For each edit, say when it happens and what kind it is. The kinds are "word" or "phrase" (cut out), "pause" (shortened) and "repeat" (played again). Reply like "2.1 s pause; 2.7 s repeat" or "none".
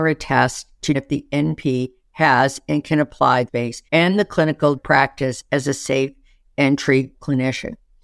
0.9 s word; 3.5 s word; 3.9 s pause; 4.8 s phrase; 7.1 s word

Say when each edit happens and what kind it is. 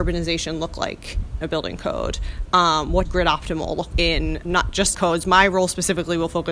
1.4 s word; 3.0 s word; 3.9 s word; 4.4 s word; 4.9 s word

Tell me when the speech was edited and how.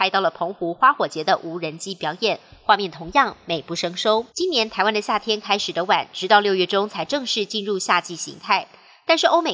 4.3 s pause

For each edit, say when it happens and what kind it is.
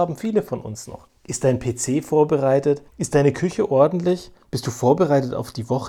1.1 s pause; 2.9 s pause

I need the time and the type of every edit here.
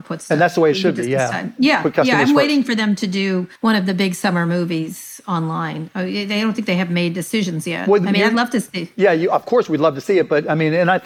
3.6 s pause

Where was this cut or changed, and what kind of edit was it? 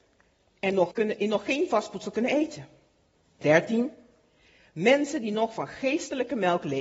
0.9 s word; 3.4 s word

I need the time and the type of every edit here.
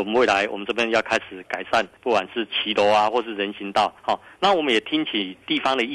2.0 s pause; 4.0 s pause

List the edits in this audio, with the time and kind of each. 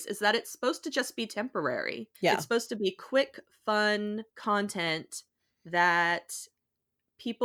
2.1 s pause; 4.3 s pause

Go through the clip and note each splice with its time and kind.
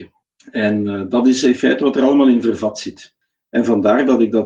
none

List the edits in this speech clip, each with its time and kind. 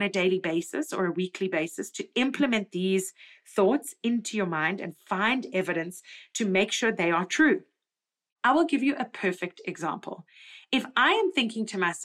none

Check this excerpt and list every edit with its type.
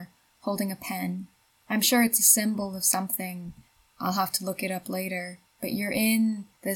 none

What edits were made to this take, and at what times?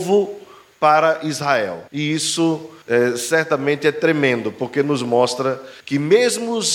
1.9 s pause; 2.8 s pause; 5.8 s pause

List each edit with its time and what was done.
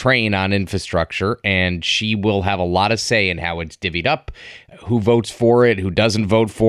4.7 s word

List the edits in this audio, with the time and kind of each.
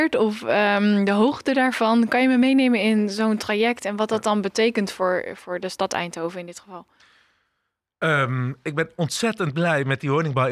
none

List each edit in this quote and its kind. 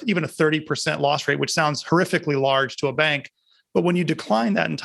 none

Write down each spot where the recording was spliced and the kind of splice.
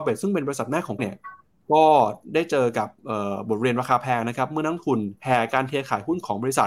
1.0 s word; 5.2 s pause

